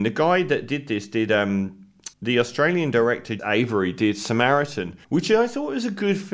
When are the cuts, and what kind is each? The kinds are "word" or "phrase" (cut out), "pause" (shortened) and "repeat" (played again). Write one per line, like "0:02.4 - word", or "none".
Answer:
0:02.1 - pause
0:03.4 - word
0:05.0 - pause